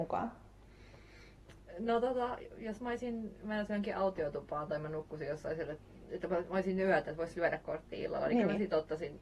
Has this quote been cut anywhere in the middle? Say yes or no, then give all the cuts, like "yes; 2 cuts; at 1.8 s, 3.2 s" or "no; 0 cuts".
no; 0 cuts